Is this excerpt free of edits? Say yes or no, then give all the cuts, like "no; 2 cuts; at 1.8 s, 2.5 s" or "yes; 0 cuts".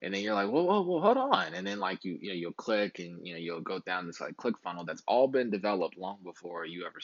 yes; 0 cuts